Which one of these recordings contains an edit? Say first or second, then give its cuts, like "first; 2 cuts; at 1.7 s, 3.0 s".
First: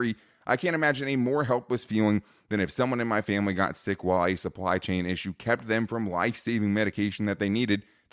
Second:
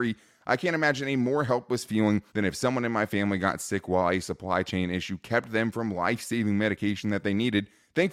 second; 1 cut; at 2.3 s